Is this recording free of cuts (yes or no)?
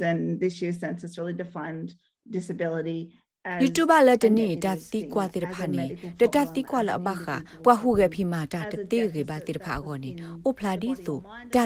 yes